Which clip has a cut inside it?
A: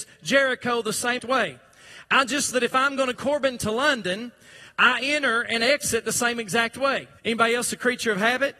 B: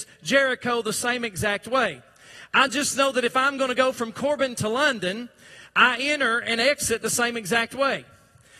A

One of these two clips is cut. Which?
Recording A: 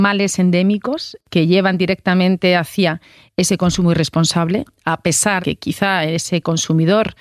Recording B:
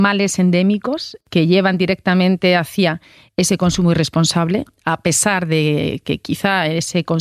A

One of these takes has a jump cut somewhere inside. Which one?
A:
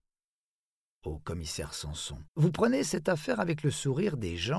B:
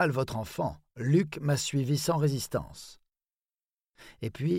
A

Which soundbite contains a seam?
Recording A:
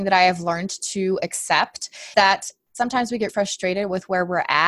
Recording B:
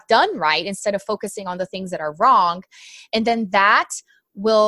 A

